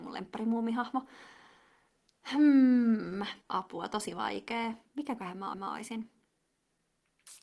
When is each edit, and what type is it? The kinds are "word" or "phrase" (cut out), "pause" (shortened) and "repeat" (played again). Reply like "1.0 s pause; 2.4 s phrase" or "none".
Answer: 3.4 s pause; 4.9 s pause; 5.5 s repeat

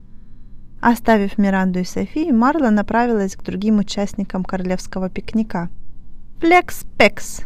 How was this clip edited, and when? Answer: none

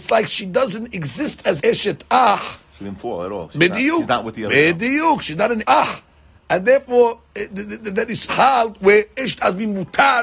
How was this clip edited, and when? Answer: 1.6 s word; 5.6 s word; 7.3 s pause; 8.3 s word

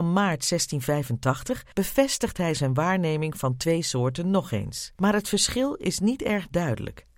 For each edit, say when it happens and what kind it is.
1.7 s pause; 5.0 s pause

